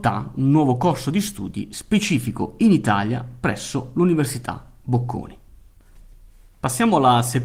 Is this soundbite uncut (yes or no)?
yes